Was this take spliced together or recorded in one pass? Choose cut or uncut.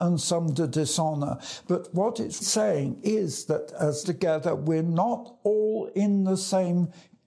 cut